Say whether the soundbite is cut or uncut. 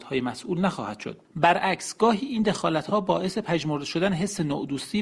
uncut